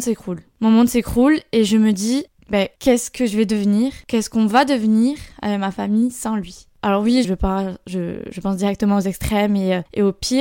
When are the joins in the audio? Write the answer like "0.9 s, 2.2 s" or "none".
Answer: 7.2 s